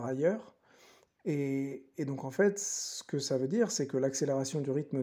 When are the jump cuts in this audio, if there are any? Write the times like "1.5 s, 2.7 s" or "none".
none